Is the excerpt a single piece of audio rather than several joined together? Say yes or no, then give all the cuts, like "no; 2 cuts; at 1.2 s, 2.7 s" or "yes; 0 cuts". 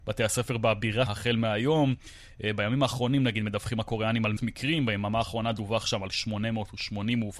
no; 2 cuts; at 1.1 s, 4.4 s